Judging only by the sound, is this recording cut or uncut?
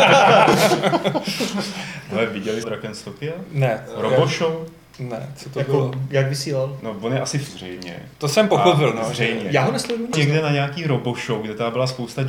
cut